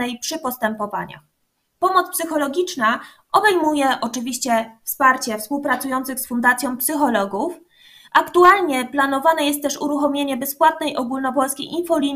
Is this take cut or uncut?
uncut